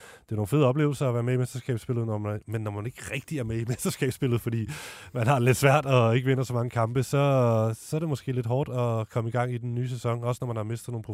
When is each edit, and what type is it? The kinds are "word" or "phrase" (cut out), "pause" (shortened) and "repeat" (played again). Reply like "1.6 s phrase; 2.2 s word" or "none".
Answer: none